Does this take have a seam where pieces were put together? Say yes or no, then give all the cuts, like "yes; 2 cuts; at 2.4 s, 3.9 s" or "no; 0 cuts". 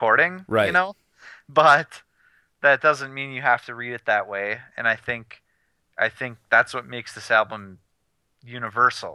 no; 0 cuts